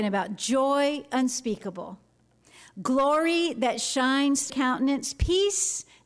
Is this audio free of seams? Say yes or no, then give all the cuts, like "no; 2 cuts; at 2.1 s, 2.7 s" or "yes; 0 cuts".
no; 1 cut; at 4.5 s